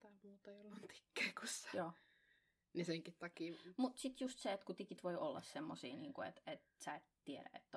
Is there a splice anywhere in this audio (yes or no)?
no